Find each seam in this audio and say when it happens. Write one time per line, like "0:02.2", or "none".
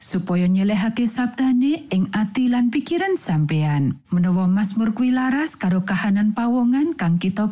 0:04.0